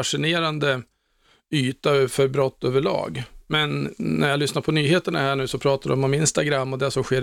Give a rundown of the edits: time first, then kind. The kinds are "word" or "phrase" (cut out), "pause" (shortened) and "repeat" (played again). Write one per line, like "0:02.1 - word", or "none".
none

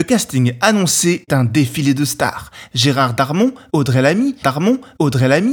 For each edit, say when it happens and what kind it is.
0:01.3 - word
0:04.4 - repeat

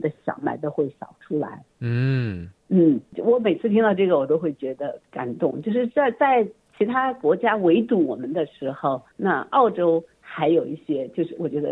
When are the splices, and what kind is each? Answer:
0:02.6 - pause
0:05.1 - pause
0:09.1 - pause

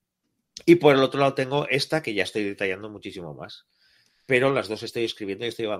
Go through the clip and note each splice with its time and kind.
none

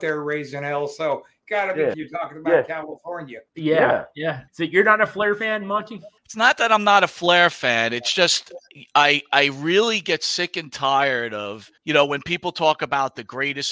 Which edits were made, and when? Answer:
0:01.9 - phrase
0:03.5 - pause
0:04.5 - pause
0:06.2 - pause
0:11.8 - pause

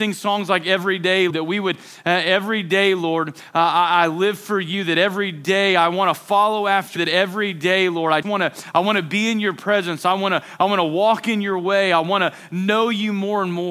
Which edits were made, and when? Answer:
0:01.3 - word
0:07.0 - word
0:08.2 - word

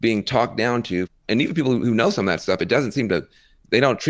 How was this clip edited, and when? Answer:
none

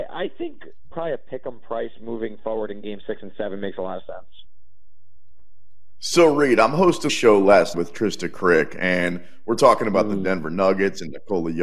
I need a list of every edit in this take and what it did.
0:00.9 - word
0:07.1 - word
0:07.7 - word

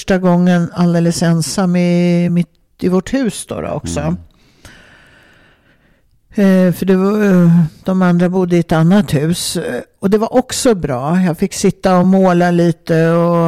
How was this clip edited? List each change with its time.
none

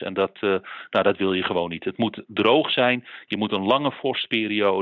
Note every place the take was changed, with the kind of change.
none

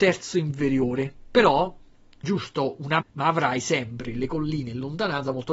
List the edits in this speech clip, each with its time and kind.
0:02.2 - word
0:03.0 - word

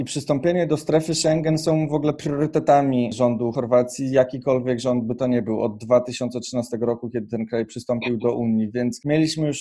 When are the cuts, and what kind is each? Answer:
none

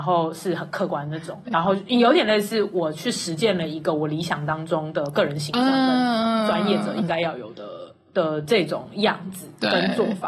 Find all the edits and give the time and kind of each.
0:01.5 - word

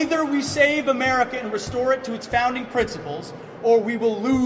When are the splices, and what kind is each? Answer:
none

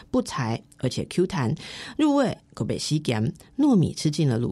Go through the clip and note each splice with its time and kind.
none

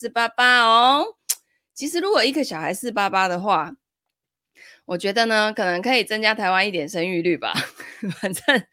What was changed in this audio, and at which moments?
none

